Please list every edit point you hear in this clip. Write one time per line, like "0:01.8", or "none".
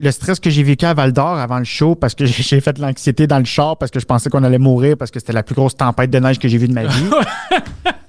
none